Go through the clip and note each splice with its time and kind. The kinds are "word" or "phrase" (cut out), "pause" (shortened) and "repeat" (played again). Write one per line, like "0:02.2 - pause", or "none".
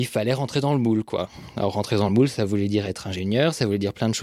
none